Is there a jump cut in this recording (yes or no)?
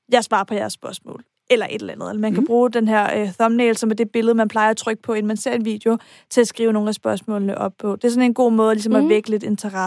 no